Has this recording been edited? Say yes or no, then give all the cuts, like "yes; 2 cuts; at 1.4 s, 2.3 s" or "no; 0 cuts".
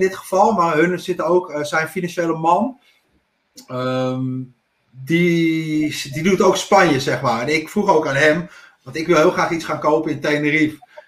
no; 0 cuts